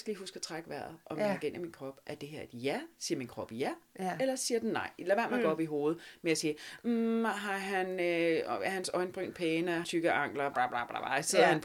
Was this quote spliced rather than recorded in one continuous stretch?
yes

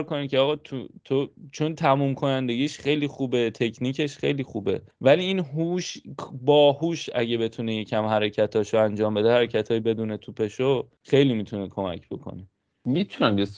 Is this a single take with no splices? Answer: yes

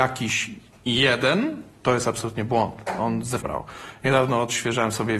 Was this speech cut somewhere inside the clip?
yes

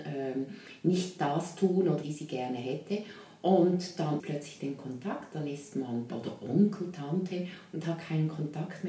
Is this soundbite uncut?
no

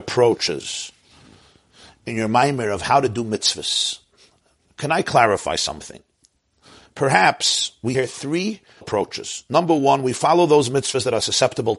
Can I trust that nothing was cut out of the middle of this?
no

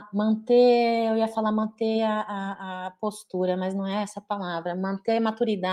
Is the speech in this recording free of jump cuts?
yes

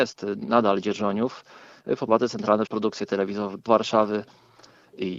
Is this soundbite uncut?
no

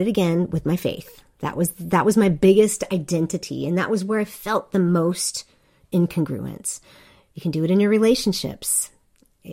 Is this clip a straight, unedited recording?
yes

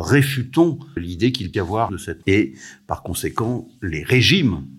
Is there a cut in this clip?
yes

